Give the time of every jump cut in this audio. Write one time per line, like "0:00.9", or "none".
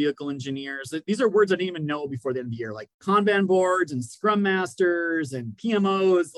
0:02.9